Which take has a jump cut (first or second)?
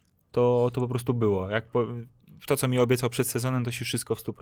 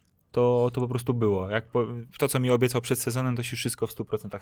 second